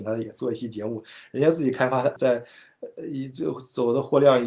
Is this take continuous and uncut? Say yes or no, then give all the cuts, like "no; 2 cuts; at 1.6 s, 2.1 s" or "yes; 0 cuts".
no; 1 cut; at 2.2 s